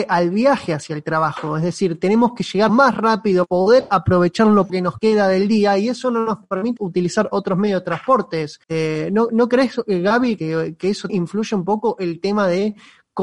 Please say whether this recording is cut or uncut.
cut